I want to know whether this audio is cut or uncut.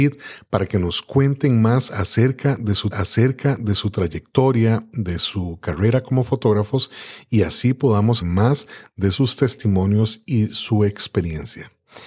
cut